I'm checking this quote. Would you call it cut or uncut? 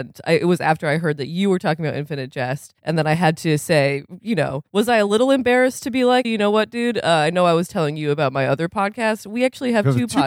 cut